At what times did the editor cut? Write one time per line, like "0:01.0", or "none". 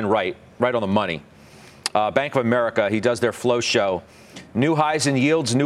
none

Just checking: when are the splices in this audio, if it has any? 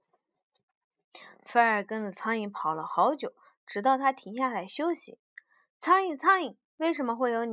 none

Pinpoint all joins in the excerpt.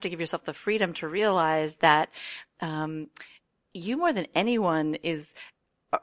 none

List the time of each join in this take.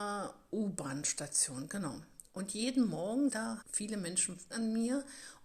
0:03.3
0:03.6
0:04.5

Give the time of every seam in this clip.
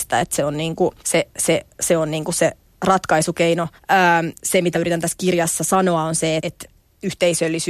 0:01.0
0:03.8
0:04.7
0:06.4

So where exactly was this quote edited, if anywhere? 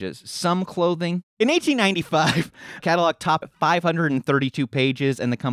0:02.8
0:03.4

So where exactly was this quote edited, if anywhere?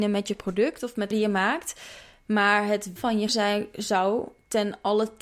0:01.1
0:03.0
0:03.3

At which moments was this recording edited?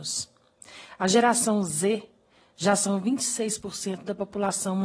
none

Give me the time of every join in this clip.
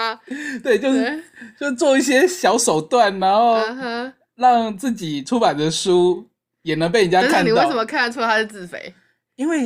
none

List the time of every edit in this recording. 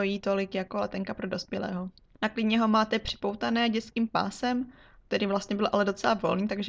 0:02.0

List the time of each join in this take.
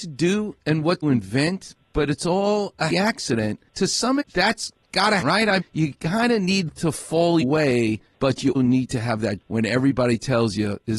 0:01.0
0:02.9
0:04.2
0:05.2
0:05.6
0:06.7
0:07.4
0:08.5
0:09.4

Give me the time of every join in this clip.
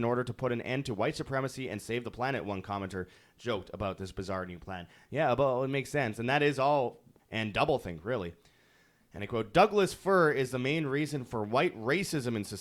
0:07.2

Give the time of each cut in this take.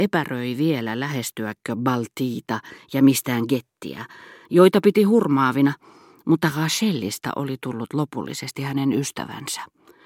none

